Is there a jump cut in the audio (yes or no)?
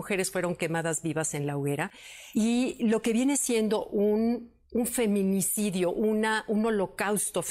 no